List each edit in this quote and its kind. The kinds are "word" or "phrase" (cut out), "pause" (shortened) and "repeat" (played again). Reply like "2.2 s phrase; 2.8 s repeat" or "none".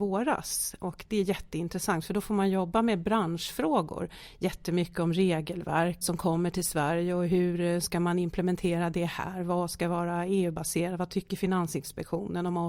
6.0 s phrase